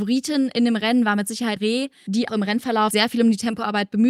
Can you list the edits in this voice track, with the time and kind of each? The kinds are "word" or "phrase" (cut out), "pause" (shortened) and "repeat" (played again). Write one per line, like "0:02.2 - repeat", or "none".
0:01.6 - word
0:02.3 - word
0:02.9 - word